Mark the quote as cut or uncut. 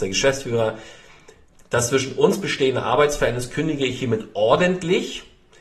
uncut